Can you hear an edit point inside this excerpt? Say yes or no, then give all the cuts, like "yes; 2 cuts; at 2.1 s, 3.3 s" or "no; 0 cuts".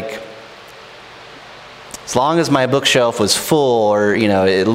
no; 0 cuts